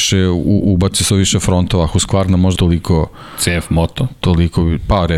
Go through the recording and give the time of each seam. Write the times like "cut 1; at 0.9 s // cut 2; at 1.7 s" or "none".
cut 1; at 1.1 s // cut 2; at 2.5 s

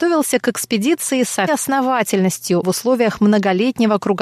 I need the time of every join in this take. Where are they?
cut 1; at 1.5 s // cut 2; at 2.6 s

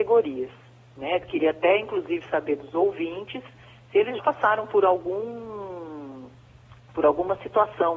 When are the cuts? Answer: cut 1; at 4.2 s

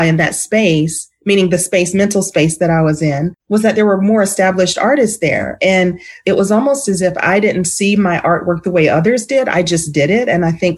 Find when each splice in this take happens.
cut 1; at 3.4 s

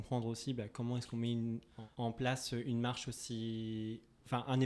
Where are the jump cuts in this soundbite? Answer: cut 1; at 1.9 s

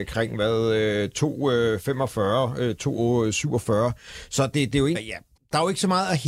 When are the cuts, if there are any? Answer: cut 1; at 4.9 s // cut 2; at 5.4 s

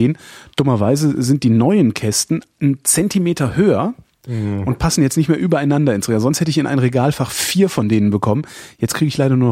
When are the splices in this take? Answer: none

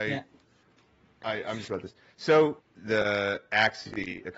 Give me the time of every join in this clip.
cut 1; at 1.7 s // cut 2; at 2.6 s

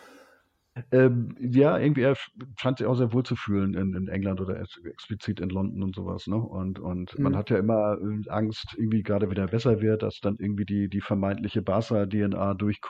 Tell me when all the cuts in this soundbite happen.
cut 1; at 9.3 s

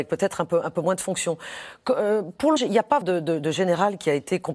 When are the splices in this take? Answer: cut 1; at 2.6 s // cut 2; at 3.0 s

